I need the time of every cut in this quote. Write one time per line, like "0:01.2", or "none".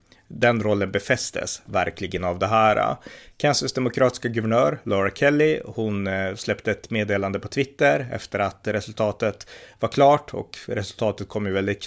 none